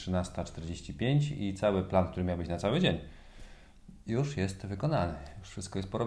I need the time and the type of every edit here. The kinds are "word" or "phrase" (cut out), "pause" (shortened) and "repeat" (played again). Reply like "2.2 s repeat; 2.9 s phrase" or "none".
none